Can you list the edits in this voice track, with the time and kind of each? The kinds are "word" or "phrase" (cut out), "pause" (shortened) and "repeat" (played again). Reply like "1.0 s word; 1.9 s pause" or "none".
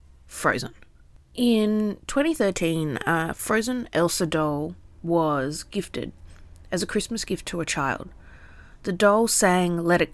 none